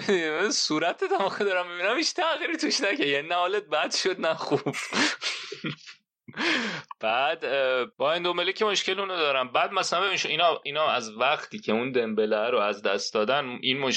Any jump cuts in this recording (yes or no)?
yes